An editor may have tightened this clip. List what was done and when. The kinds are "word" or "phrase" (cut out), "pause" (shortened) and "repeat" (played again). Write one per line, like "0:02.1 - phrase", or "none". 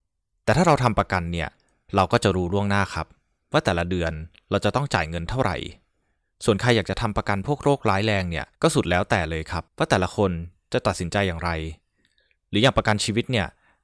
0:08.5 - pause
0:09.7 - pause

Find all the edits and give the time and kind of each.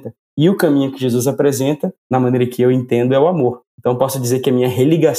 0:02.0 - pause

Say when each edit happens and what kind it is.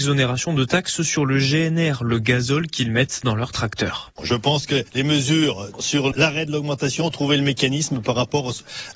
none

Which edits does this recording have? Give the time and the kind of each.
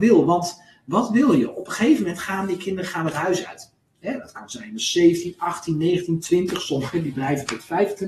none

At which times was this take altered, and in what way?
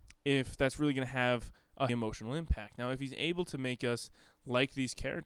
0:01.9 - word

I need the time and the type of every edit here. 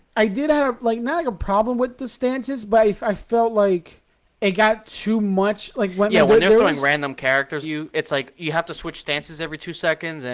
0:04.1 - pause
0:07.6 - word

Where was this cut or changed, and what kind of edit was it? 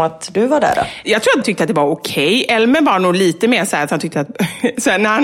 0:01.4 - word
0:04.1 - phrase

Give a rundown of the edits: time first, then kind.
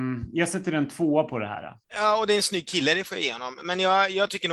none

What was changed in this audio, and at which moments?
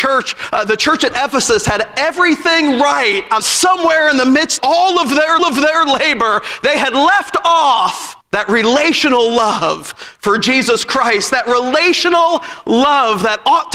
0:03.4 - phrase
0:04.6 - word
0:05.4 - repeat
0:08.2 - pause

